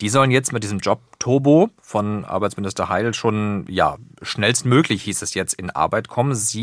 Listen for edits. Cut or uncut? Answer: uncut